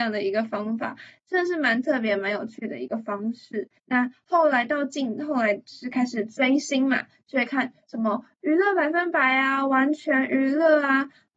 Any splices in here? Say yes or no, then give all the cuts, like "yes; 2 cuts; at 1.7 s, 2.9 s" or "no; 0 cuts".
yes; 1 cut; at 3.8 s